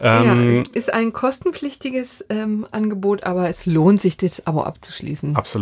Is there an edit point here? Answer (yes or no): no